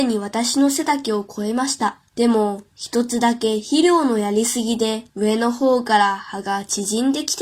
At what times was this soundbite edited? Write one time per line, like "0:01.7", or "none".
0:02.1
0:05.1